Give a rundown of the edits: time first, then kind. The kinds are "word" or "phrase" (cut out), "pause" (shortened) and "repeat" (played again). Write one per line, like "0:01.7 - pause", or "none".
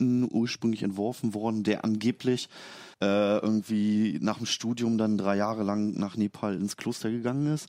0:02.9 - pause